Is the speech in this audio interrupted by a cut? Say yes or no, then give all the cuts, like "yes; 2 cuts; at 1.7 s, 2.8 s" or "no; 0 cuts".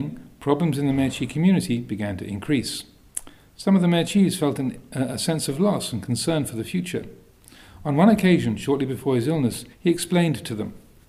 yes; 1 cut; at 9.7 s